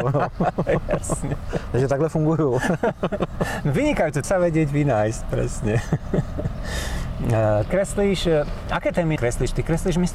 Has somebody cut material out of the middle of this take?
yes; 3 cuts; at 4.2 s, 7.7 s, 9.2 s

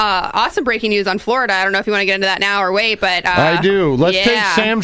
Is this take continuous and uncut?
yes; 0 cuts

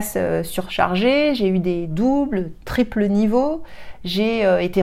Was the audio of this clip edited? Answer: no; 0 cuts

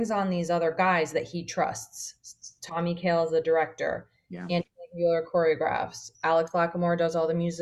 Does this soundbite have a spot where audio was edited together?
no; 0 cuts

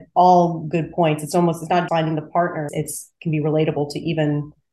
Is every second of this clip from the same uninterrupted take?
no; 2 cuts; at 1.9 s, 2.7 s

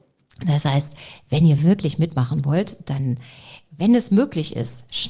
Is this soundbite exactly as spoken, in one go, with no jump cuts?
yes; 0 cuts

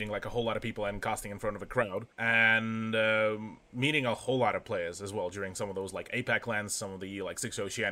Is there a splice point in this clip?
yes; 1 cut; at 2.1 s

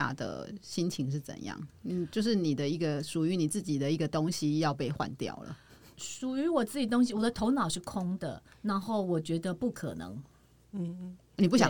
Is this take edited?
no; 0 cuts

